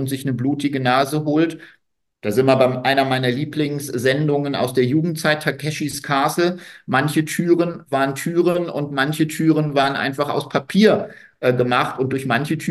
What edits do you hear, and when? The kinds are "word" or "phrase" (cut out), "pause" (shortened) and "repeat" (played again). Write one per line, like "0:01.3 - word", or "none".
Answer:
none